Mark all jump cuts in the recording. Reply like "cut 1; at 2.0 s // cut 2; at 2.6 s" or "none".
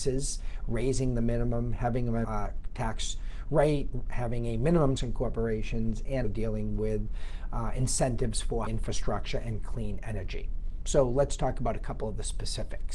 cut 1; at 2.2 s // cut 2; at 5.0 s // cut 3; at 6.2 s // cut 4; at 8.7 s